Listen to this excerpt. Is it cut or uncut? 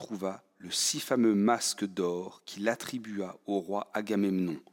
uncut